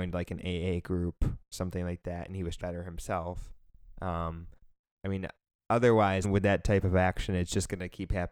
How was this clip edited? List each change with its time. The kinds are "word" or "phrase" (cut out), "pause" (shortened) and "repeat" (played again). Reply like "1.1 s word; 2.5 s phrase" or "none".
1.5 s word; 2.6 s phrase; 6.2 s phrase